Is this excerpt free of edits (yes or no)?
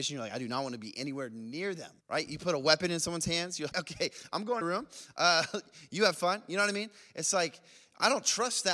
no